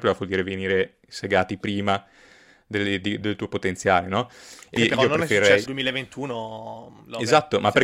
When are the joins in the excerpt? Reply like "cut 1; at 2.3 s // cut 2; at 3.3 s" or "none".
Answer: cut 1; at 3.2 s // cut 2; at 4.8 s // cut 3; at 5.7 s